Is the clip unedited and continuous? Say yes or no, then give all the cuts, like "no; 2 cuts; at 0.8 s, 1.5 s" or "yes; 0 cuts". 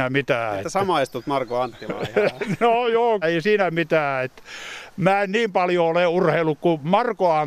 no; 1 cut; at 3.2 s